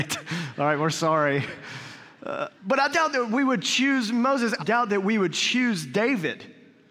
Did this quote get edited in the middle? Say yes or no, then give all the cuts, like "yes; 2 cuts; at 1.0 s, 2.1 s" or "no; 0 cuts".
yes; 2 cuts; at 2.6 s, 4.6 s